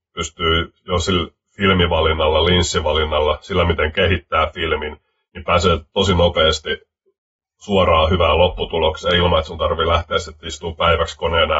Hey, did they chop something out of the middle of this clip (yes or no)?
no